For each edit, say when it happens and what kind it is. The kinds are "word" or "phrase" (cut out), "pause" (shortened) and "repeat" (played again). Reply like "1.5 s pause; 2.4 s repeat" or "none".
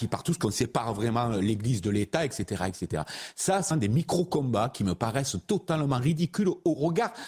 3.7 s word